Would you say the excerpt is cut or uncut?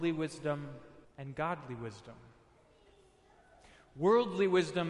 cut